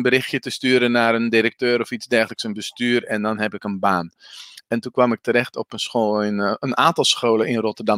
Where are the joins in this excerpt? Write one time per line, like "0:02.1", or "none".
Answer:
none